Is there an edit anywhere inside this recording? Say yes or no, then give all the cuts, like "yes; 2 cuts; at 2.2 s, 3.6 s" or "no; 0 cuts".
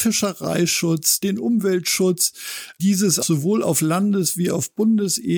yes; 1 cut; at 3.2 s